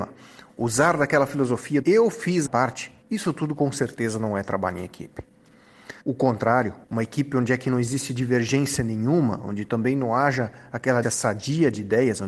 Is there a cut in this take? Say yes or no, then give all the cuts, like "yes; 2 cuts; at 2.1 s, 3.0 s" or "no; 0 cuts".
yes; 6 cuts; at 1.8 s, 2.5 s, 3.0 s, 6.0 s, 6.8 s, 11.0 s